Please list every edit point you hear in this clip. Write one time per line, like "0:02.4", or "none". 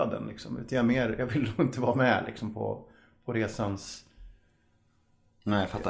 none